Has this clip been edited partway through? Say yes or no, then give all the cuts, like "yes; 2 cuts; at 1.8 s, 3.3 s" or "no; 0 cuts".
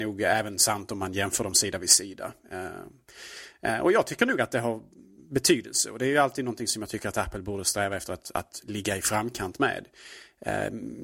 no; 0 cuts